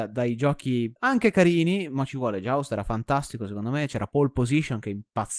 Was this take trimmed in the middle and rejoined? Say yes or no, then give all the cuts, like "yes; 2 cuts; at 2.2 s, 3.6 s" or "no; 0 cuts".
yes; 1 cut; at 1.0 s